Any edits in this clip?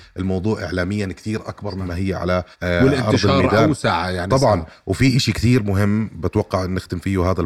yes; 1 cut; at 2.5 s

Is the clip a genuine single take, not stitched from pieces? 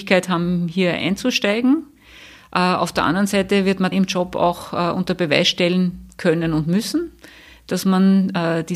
no; 1 cut; at 3.9 s

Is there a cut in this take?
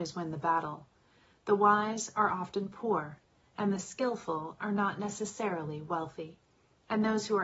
no; 0 cuts

